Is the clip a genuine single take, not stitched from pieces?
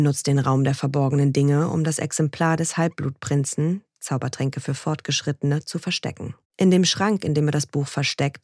no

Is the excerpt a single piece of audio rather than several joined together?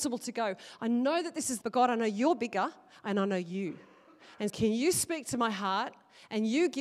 no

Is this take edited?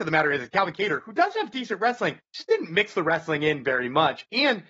yes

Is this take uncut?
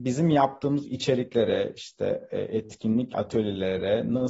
no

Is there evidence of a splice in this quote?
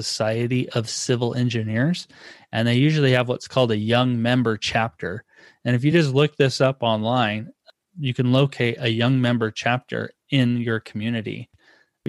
no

